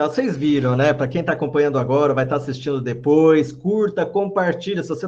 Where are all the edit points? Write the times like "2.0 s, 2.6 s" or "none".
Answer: none